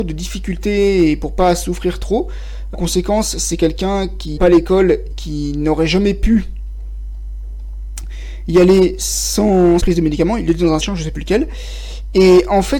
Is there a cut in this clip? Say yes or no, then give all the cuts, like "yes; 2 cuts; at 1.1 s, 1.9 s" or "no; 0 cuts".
yes; 5 cuts; at 2.7 s, 4.4 s, 5.1 s, 9.8 s, 10.8 s